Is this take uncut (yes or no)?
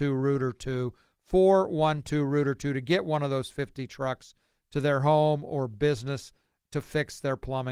yes